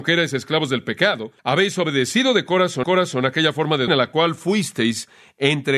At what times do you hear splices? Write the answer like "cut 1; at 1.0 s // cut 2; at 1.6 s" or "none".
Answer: cut 1; at 1.4 s // cut 2; at 2.8 s // cut 3; at 3.9 s